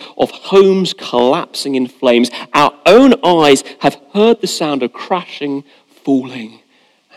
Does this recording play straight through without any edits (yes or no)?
yes